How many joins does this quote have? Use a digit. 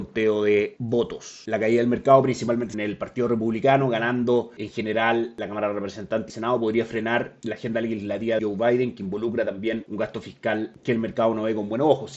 3